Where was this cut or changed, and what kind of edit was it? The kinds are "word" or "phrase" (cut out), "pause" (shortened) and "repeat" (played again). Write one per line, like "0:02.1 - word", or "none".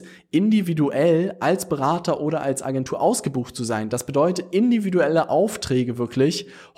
none

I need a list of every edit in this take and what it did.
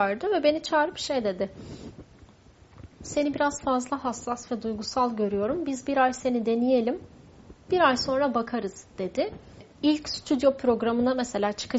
0:02.9 - pause

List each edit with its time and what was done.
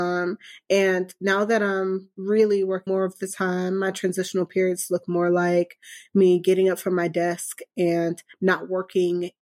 0:02.9 - phrase

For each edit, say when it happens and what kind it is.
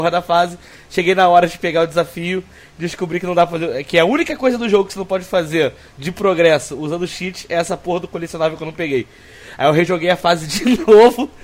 none

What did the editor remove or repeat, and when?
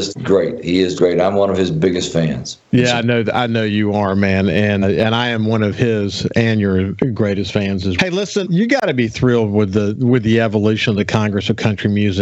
0:01.0 - word
0:04.8 - word
0:08.0 - word
0:08.4 - word

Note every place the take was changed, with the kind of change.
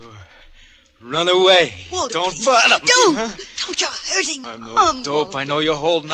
0:04.4 - word

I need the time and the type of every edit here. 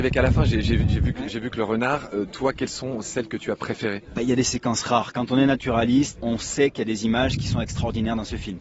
0:06.2 - word

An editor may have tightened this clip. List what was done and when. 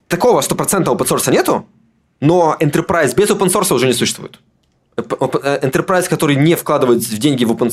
none

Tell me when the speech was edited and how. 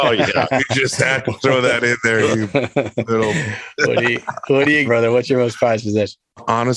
0:04.8 - word

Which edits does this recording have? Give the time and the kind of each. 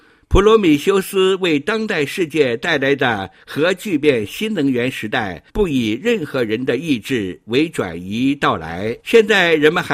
0:05.5 - pause
0:09.0 - pause

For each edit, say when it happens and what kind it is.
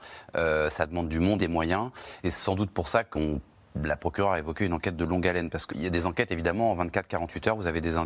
0:01.4 - word
0:02.2 - word
0:03.1 - word
0:05.7 - word

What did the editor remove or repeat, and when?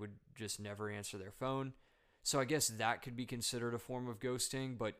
none

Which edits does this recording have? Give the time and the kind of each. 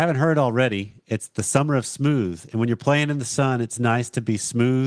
none

